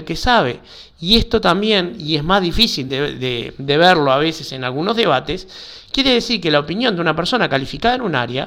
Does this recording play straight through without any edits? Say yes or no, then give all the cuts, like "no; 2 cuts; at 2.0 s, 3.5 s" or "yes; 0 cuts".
yes; 0 cuts